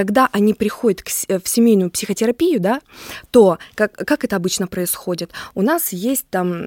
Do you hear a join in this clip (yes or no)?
no